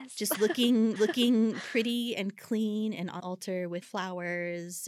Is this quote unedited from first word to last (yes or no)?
no